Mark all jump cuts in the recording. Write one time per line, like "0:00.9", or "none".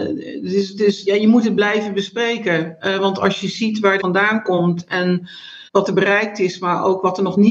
0:01.1
0:04.0
0:05.7